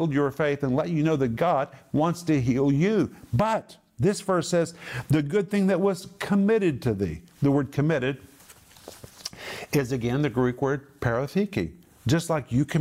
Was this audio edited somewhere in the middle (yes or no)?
no